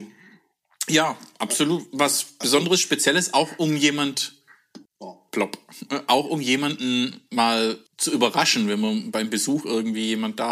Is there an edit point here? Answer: yes; 2 cuts; at 4.8 s, 7.9 s

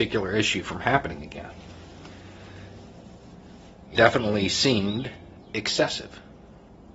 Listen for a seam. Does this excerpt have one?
yes; 1 cut; at 3.9 s

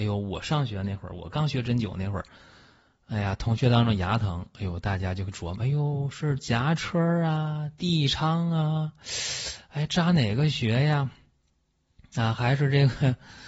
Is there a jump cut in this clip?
no; 0 cuts

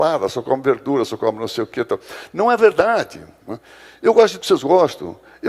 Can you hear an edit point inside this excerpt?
yes; 1 cut; at 4.4 s

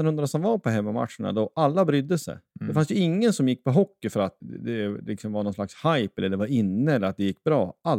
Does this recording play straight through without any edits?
no; 2 cuts; at 2.5 s, 4.4 s

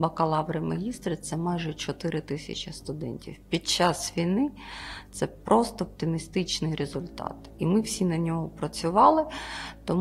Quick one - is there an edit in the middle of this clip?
no; 0 cuts

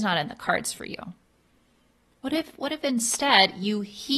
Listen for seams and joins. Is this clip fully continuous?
yes; 0 cuts

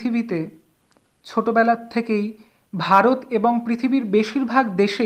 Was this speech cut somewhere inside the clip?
no; 0 cuts

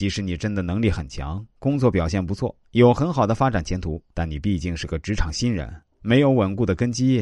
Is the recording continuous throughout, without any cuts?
no; 1 cut; at 4.1 s

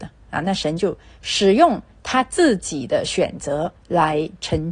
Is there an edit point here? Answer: yes; 1 cut; at 3.8 s

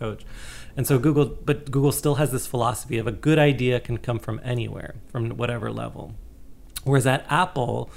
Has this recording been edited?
no; 0 cuts

